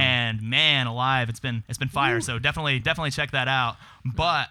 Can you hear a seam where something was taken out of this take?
no; 0 cuts

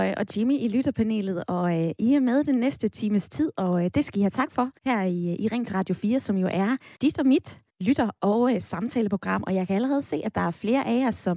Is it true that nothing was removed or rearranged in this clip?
no; 3 cuts; at 4.8 s, 6.9 s, 7.7 s

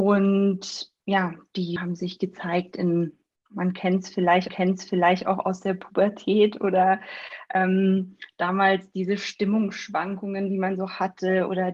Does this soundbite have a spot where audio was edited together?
yes; 2 cuts; at 1.8 s, 4.5 s

